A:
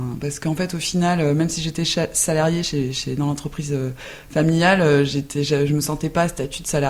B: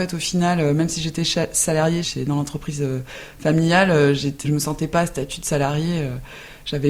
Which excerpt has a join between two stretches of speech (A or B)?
B